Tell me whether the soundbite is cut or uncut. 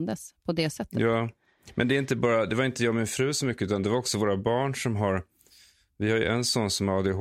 uncut